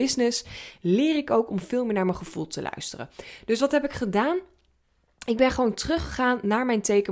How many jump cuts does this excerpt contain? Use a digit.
0